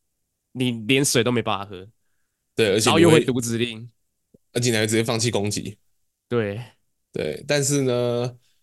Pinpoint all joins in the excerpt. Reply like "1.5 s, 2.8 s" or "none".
none

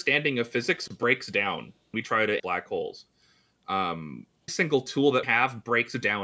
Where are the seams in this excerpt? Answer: 1.9 s, 2.4 s, 4.5 s, 5.2 s

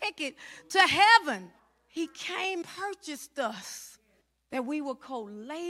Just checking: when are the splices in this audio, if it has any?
1.6 s, 2.6 s, 4.2 s

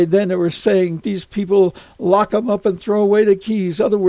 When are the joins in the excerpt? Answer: 1.0 s

